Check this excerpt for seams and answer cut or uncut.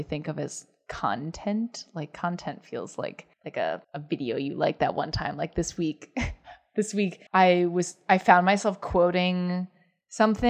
cut